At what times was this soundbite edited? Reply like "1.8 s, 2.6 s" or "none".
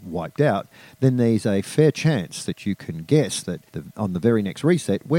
3.7 s

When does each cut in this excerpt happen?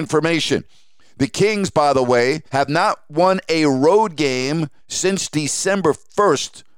2.5 s, 4.8 s

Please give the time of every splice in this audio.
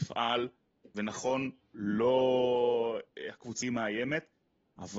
3.6 s

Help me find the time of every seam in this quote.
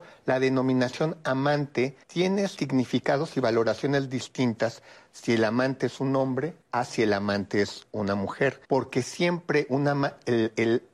2.0 s, 6.6 s, 8.6 s

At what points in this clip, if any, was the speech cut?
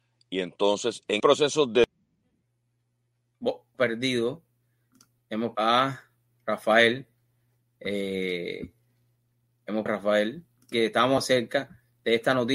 1.2 s, 3.7 s, 5.5 s, 9.9 s, 10.7 s, 11.2 s

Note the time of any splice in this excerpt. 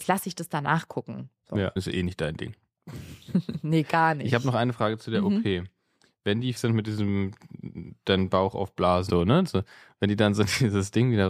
1.8 s, 6.6 s, 9.1 s

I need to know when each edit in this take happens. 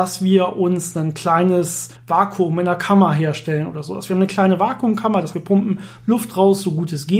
2.0 s, 5.3 s

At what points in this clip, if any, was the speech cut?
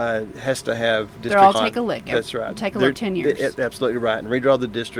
1.5 s, 2.9 s

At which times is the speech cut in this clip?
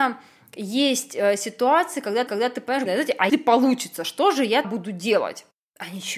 2.3 s, 2.9 s, 3.3 s, 4.6 s

